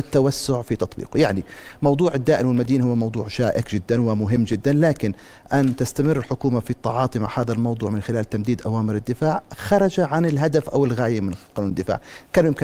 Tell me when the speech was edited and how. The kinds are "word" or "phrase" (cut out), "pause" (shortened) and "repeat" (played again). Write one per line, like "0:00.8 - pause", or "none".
none